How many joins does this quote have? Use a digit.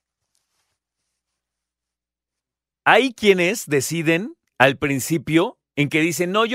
1